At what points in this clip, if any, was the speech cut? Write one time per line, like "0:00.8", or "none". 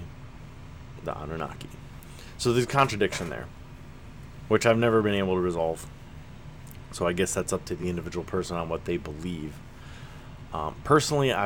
none